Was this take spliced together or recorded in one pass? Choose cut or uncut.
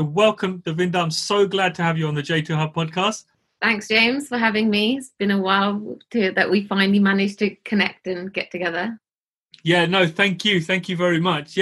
uncut